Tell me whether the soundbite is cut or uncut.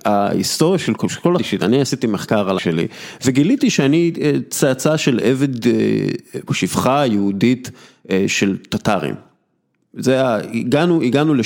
cut